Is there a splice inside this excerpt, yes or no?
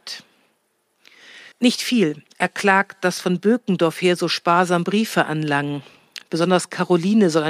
yes